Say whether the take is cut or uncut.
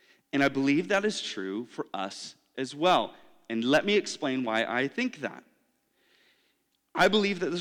uncut